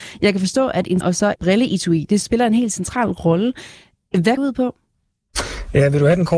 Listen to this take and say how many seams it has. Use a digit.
4